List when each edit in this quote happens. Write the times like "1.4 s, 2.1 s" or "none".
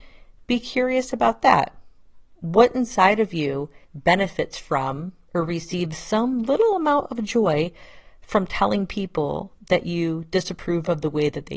3.8 s